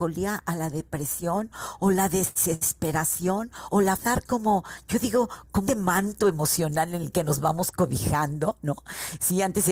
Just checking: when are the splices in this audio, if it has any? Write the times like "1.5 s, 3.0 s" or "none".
4.0 s, 5.7 s